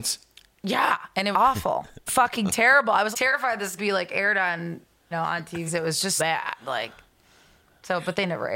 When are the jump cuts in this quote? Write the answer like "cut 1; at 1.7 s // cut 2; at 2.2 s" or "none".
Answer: cut 1; at 1.3 s // cut 2; at 2.1 s // cut 3; at 3.1 s // cut 4; at 3.8 s // cut 5; at 5.1 s // cut 6; at 5.7 s // cut 7; at 6.2 s